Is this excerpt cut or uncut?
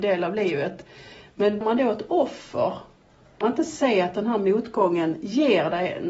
cut